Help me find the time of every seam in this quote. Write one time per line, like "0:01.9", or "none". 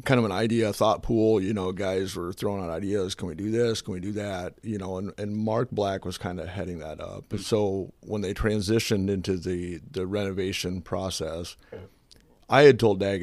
none

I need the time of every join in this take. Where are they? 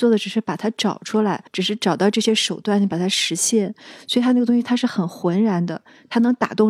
0:01.5

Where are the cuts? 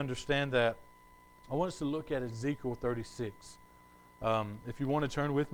none

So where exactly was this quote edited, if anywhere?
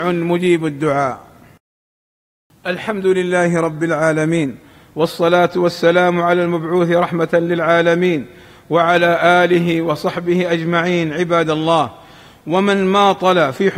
none

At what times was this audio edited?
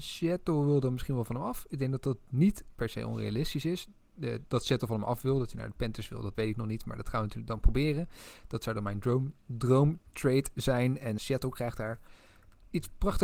0:06.3
0:11.2

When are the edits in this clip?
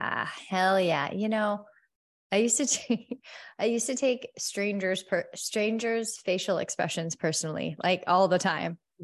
none

